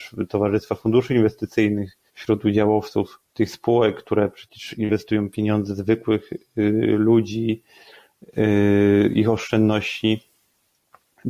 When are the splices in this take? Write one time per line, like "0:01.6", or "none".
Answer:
0:02.1
0:03.2